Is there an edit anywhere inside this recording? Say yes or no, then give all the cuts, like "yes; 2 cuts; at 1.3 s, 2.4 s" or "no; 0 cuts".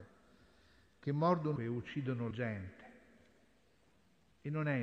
yes; 2 cuts; at 1.6 s, 2.3 s